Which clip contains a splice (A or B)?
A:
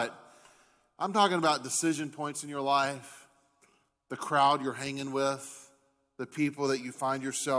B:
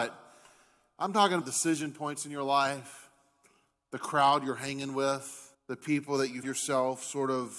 B